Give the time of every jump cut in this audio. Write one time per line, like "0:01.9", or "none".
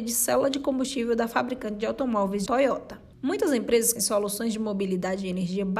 0:02.5
0:03.1
0:04.0